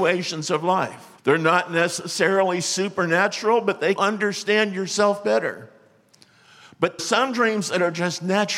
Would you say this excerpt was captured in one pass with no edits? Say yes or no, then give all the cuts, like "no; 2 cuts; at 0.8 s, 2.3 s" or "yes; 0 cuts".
no; 3 cuts; at 1.2 s, 4.0 s, 7.0 s